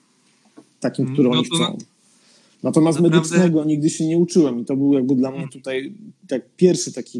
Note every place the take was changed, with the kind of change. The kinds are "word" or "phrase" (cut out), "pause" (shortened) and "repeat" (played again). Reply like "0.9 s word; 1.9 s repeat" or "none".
none